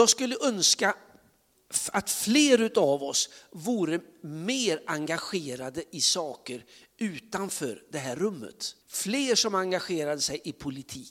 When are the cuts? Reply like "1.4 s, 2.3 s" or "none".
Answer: 8.8 s